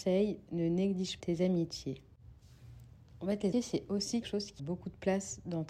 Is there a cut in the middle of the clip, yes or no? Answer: yes